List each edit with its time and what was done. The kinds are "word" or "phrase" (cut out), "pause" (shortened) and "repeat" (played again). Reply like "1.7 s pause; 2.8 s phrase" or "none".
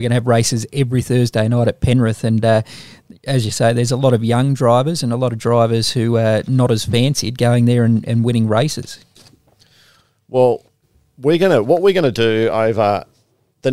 10.8 s pause